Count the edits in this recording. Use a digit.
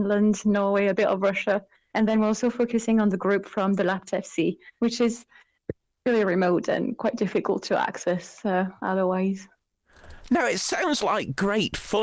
0